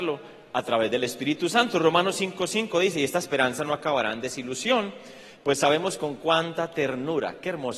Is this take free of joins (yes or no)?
yes